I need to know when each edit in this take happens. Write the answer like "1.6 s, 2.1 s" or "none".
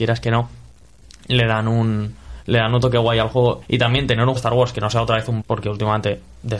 3.6 s, 4.4 s, 5.4 s